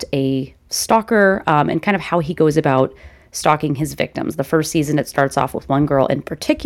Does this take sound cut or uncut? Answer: uncut